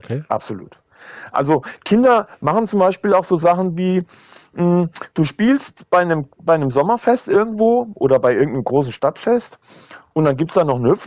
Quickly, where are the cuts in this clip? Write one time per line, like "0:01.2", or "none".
none